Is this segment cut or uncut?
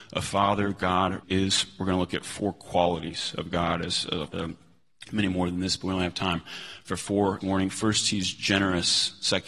cut